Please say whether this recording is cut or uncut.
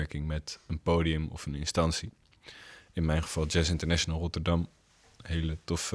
uncut